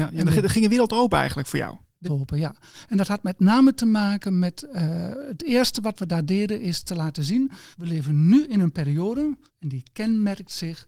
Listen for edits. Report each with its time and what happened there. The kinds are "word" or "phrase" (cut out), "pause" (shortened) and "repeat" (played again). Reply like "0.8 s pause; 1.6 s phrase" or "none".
2.0 s phrase; 7.7 s pause; 9.5 s pause